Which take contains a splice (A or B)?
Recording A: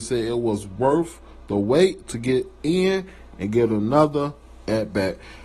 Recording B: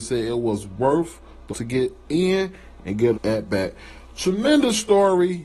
B